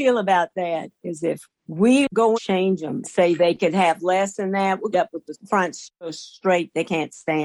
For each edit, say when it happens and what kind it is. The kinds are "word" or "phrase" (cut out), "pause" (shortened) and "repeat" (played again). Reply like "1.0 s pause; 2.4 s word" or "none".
1.6 s pause; 2.3 s phrase; 3.0 s word; 4.9 s phrase; 5.2 s word